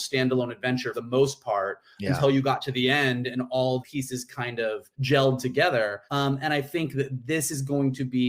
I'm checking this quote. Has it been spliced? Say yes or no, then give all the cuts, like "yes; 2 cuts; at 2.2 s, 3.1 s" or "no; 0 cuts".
yes; 4 cuts; at 0.9 s, 3.8 s, 4.9 s, 6.1 s